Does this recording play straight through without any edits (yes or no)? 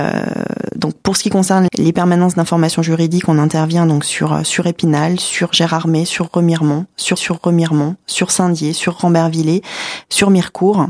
no